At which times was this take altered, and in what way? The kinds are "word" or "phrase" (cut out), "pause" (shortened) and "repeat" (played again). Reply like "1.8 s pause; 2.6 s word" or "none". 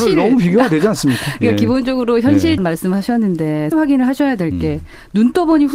2.6 s word; 3.7 s word